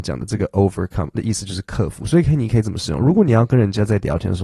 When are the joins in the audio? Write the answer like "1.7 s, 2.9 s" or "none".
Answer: 1.2 s